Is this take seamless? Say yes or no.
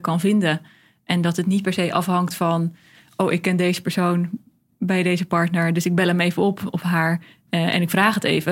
yes